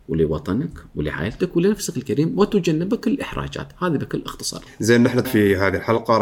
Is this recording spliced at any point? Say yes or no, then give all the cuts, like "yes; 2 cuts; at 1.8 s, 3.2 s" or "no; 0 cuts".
yes; 1 cut; at 5.2 s